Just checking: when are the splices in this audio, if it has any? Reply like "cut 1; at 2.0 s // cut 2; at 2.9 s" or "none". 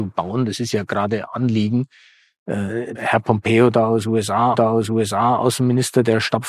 cut 1; at 2.9 s // cut 2; at 4.5 s